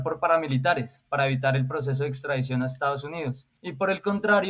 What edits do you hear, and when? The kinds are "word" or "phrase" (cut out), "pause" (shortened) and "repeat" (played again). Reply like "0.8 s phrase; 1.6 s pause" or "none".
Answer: 3.6 s pause